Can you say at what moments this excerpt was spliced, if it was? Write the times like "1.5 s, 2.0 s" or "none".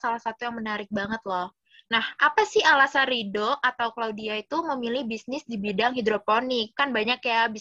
none